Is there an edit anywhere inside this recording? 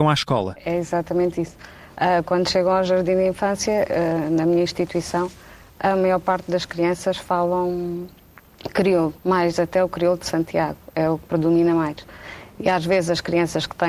yes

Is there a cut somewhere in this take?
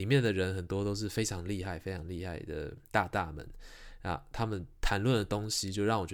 yes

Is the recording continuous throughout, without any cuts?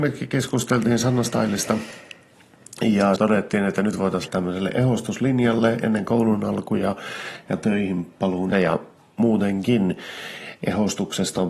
no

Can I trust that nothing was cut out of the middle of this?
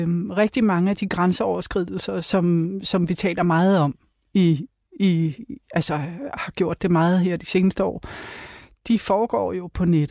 yes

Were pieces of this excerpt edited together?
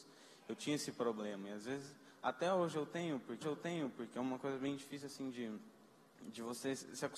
yes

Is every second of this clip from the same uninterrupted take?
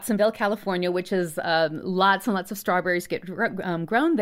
yes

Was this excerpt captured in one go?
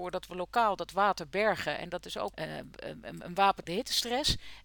no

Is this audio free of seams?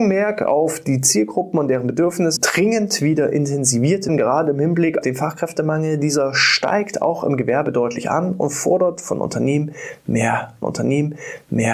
no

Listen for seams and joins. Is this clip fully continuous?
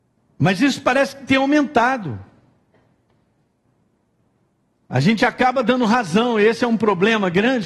yes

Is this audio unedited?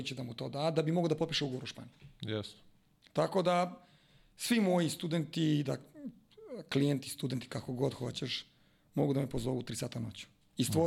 yes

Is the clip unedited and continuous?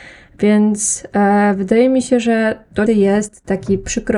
no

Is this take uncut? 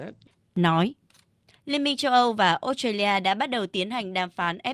yes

